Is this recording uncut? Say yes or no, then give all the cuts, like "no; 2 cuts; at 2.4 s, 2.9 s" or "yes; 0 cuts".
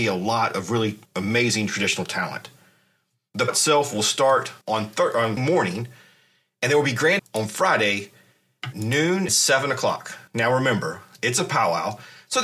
no; 8 cuts; at 1.0 s, 3.5 s, 4.6 s, 5.4 s, 7.2 s, 8.7 s, 9.3 s, 10.3 s